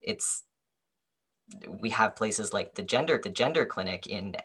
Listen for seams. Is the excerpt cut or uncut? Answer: cut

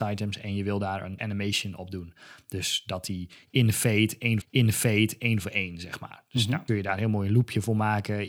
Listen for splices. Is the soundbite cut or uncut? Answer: cut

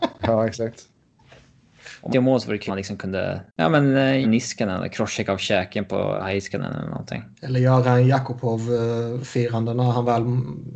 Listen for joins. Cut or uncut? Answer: cut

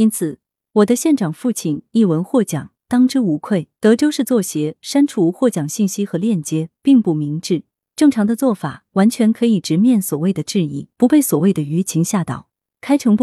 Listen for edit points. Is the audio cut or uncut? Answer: cut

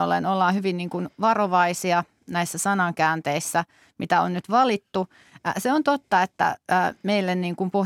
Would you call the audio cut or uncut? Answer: uncut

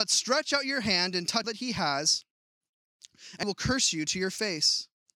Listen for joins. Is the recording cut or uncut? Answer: cut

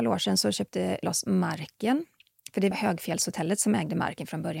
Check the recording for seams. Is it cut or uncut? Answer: cut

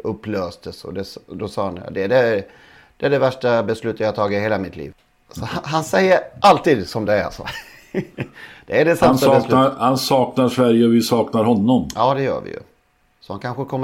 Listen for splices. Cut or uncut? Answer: uncut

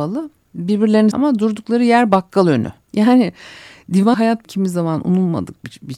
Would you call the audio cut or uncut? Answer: cut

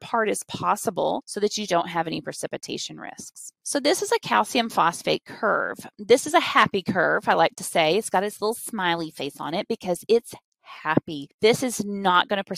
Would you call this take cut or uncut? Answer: cut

